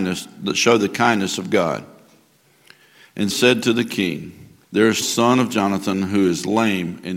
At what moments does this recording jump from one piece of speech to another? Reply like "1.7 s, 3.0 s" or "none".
3.3 s, 4.6 s, 5.0 s